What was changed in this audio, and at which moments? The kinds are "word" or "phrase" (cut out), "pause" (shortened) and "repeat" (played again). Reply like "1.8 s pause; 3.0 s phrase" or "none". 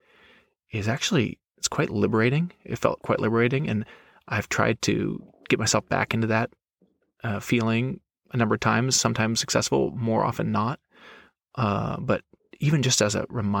none